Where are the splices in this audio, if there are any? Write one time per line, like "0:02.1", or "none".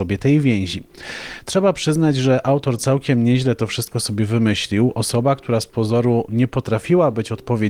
none